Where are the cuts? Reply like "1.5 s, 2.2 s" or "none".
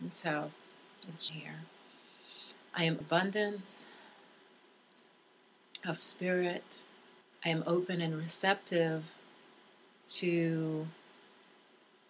1.3 s, 3.0 s, 7.2 s